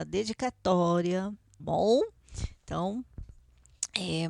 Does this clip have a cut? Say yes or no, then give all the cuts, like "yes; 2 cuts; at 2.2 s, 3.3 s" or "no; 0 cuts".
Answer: yes; 1 cut; at 1.6 s